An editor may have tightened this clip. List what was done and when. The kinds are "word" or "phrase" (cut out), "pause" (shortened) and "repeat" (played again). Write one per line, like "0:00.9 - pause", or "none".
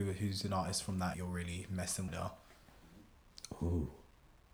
0:01.1 - phrase
0:02.1 - phrase